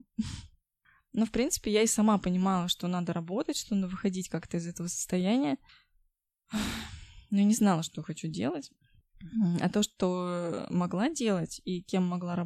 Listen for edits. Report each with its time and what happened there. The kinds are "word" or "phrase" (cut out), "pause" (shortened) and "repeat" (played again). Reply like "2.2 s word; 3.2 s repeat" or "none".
none